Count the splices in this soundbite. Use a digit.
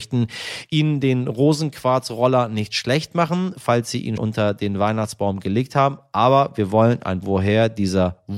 2